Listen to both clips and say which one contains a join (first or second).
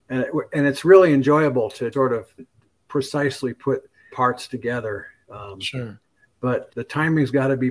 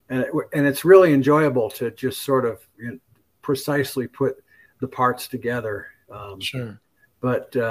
first